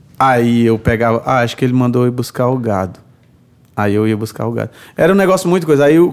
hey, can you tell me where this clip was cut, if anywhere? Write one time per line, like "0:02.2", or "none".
none